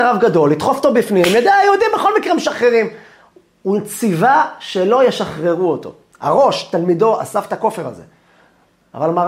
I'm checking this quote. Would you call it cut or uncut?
uncut